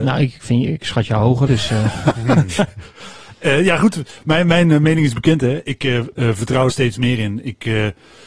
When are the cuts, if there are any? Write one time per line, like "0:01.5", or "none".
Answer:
0:01.5
0:06.7